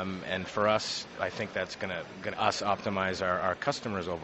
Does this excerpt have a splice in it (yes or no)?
yes